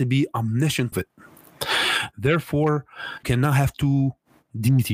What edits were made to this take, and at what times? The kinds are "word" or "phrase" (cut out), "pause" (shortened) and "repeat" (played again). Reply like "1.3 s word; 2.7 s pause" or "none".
0.9 s word; 3.2 s word